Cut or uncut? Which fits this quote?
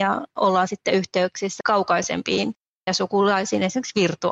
cut